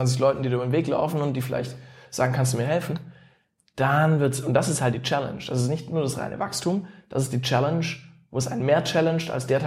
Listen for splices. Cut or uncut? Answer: uncut